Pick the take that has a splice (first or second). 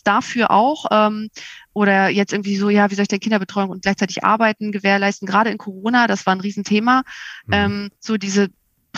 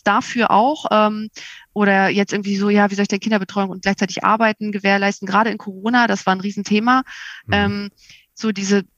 first